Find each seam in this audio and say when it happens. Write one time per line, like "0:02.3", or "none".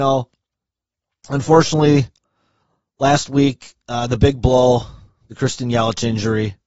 none